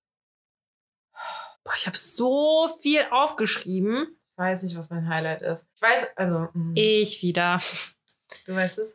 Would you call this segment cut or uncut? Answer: cut